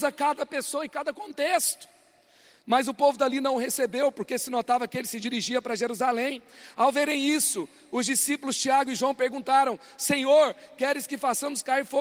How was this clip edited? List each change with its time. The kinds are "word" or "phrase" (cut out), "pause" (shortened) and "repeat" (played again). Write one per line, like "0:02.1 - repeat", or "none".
none